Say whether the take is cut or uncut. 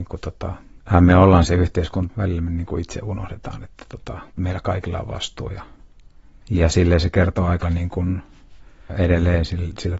cut